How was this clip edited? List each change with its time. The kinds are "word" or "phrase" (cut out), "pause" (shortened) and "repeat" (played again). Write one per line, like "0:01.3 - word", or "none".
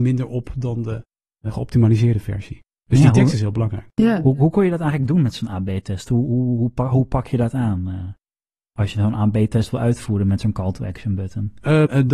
none